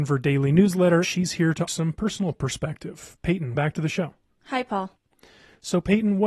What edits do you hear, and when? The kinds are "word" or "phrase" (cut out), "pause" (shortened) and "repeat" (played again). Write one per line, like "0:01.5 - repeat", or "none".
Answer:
0:01.0 - word
0:01.7 - word
0:03.6 - word

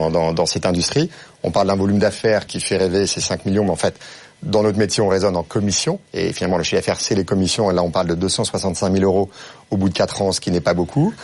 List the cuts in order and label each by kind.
0:02.5 - word
0:06.1 - pause

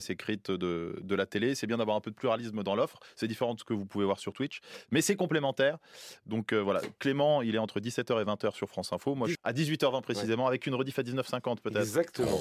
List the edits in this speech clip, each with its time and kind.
0:09.3 - word

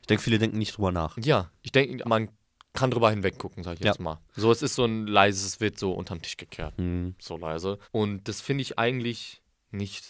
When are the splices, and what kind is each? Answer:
0:02.0 - word
0:07.8 - pause

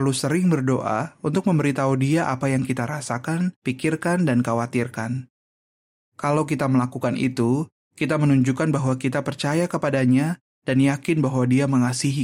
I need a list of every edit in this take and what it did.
0:03.6 - pause

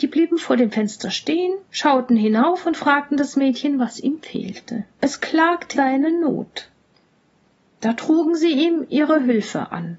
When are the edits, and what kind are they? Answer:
0:01.6 - pause
0:04.9 - pause
0:05.7 - word

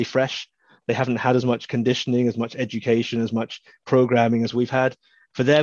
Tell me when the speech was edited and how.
none

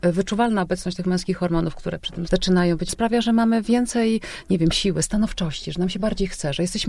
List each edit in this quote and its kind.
0:02.3 - word
0:02.9 - word

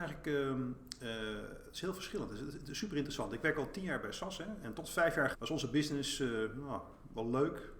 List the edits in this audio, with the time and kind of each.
0:04.6 - word
0:05.3 - word

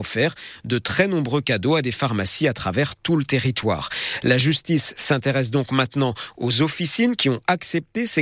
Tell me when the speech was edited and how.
none

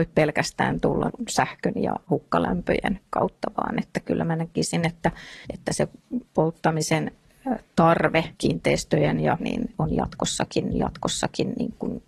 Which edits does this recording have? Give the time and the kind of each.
0:01.1 - word
0:05.4 - pause
0:06.3 - pause
0:08.3 - pause
0:09.4 - phrase
0:10.7 - repeat

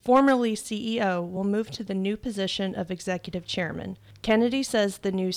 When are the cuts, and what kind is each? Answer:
none

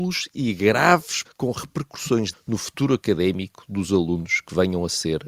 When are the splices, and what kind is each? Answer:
0:01.2 - word
0:02.3 - word

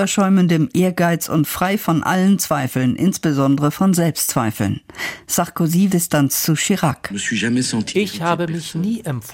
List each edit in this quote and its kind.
0:05.9 - phrase

